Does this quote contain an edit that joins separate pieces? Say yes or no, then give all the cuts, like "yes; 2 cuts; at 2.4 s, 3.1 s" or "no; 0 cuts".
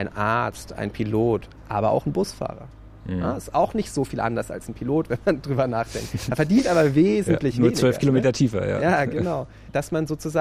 no; 0 cuts